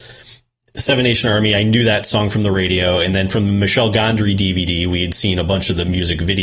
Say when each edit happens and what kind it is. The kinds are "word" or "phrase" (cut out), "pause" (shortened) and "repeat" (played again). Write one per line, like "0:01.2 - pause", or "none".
none